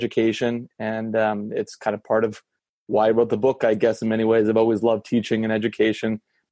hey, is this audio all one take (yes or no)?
yes